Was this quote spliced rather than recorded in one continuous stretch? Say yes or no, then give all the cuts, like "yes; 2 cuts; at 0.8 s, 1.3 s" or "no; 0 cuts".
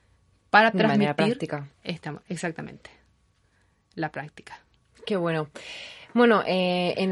yes; 1 cut; at 1.7 s